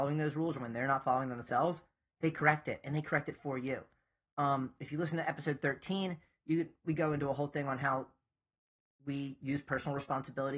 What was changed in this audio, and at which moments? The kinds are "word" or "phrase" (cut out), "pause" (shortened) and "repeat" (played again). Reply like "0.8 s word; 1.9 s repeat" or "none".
none